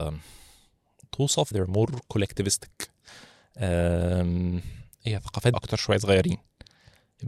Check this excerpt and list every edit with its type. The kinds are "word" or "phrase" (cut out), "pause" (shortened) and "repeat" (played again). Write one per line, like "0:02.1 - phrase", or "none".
0:01.5 - word
0:04.9 - pause
0:05.5 - word